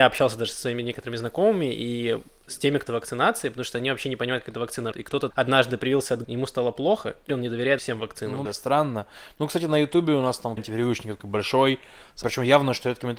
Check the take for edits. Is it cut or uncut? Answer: cut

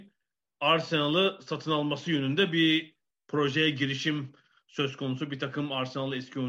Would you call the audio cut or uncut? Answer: uncut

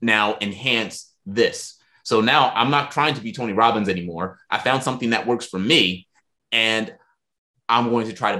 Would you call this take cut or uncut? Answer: uncut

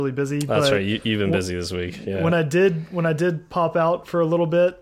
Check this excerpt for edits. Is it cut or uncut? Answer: uncut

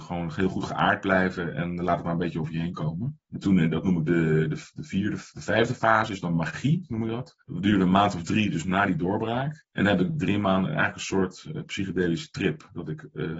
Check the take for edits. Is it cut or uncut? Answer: cut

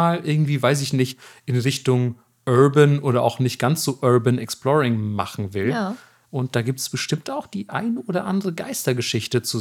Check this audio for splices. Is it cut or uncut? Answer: uncut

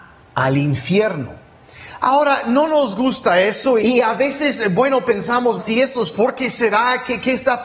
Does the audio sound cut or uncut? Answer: cut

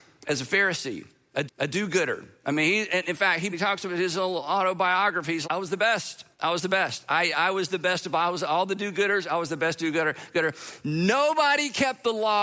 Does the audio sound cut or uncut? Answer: cut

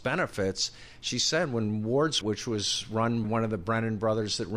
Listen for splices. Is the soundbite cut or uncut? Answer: cut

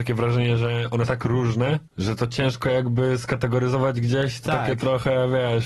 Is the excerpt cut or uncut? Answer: cut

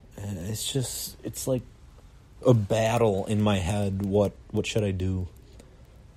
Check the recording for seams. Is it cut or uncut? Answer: uncut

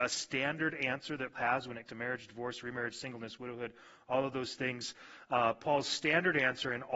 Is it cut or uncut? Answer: cut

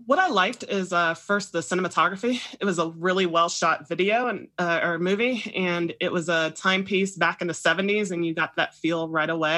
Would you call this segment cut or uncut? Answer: uncut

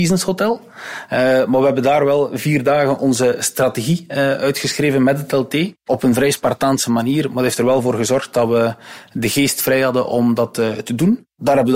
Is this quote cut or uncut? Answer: uncut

